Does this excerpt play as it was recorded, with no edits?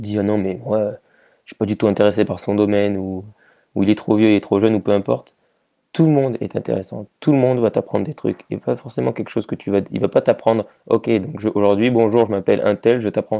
yes; 0 cuts

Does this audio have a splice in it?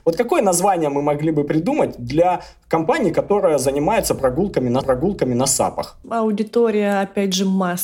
yes; 2 cuts; at 4.8 s, 6.0 s

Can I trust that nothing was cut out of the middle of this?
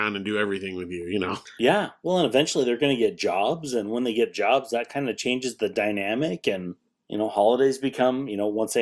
yes; 0 cuts

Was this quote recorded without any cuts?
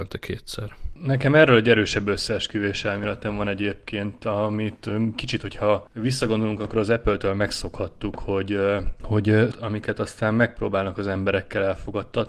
no; 1 cut; at 9.5 s

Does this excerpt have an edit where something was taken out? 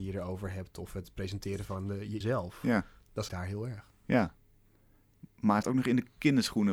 yes; 3 cuts; at 2.2 s, 3.3 s, 5.6 s

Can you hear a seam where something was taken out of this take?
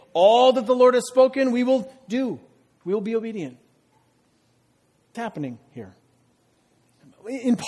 yes; 1 cut; at 5.1 s

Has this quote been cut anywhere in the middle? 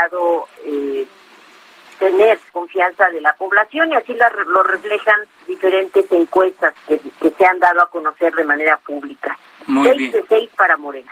yes; 3 cuts; at 2.5 s, 5.5 s, 6.8 s

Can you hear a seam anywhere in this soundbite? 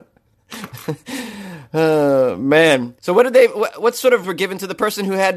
yes; 2 cuts; at 3.0 s, 4.2 s

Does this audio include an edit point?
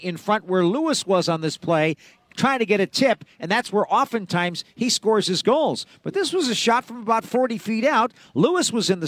no; 0 cuts

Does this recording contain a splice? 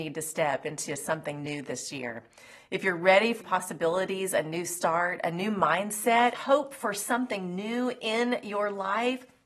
yes; 2 cuts; at 3.4 s, 6.3 s

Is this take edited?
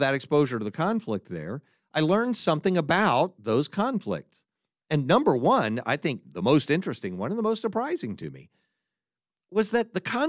no; 0 cuts

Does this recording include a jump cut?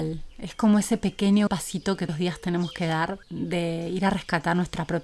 yes; 3 cuts; at 1.5 s, 2.1 s, 3.2 s

